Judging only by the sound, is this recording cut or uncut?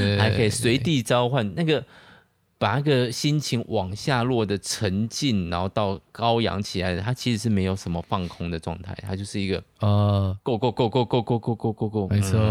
uncut